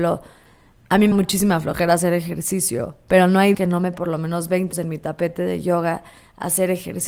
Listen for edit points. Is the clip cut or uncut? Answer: cut